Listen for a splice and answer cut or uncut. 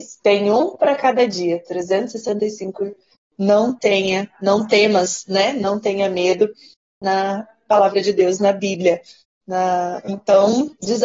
uncut